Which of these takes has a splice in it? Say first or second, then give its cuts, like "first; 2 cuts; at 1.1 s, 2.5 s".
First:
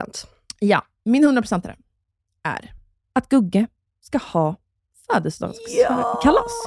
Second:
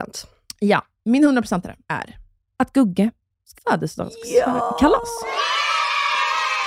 second; 2 cuts; at 1.8 s, 3.5 s